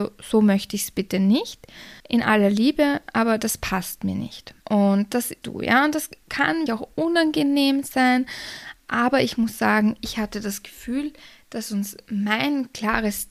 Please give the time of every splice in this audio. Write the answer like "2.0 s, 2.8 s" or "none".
2.0 s, 4.6 s, 5.4 s, 6.7 s

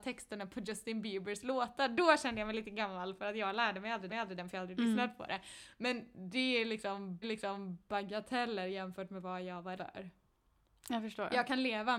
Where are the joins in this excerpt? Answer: 4.1 s, 7.2 s, 9.8 s

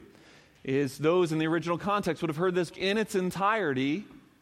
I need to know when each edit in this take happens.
2.7 s

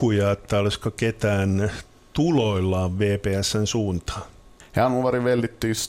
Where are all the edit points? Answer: none

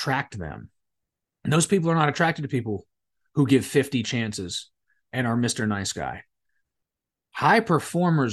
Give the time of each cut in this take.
none

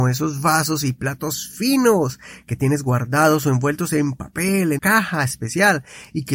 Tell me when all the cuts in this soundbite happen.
4.8 s

